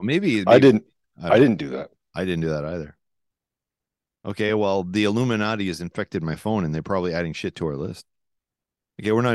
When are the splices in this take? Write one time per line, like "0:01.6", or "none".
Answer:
none